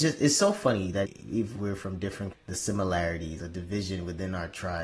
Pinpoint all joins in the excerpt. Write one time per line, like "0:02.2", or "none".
0:01.0
0:02.3
0:03.4